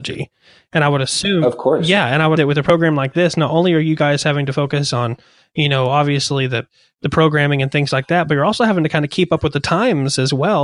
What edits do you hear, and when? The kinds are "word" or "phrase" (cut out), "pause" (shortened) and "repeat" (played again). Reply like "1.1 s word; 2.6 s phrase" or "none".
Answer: 2.4 s word